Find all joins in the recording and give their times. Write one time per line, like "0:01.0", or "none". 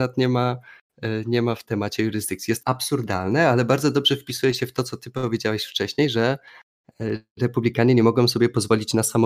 0:01.6
0:02.6